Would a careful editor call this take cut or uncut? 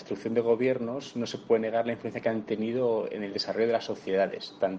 uncut